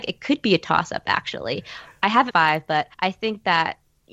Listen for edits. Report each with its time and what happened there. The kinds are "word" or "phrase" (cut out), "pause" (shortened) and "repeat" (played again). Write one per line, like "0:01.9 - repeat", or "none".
0:02.3 - phrase
0:02.9 - pause